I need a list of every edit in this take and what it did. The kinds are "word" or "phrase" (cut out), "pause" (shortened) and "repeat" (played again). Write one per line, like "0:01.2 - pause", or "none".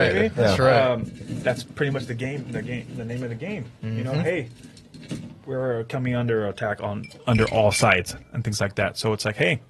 none